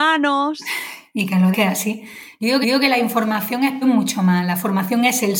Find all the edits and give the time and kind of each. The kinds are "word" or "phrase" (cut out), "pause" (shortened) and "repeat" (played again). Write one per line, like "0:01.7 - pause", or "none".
0:01.5 - word
0:02.6 - repeat
0:03.8 - phrase